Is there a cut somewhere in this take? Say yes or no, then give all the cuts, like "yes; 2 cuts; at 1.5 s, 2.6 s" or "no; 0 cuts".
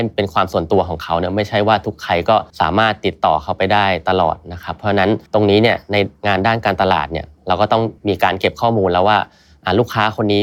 yes; 3 cuts; at 2.5 s, 5.3 s, 8.0 s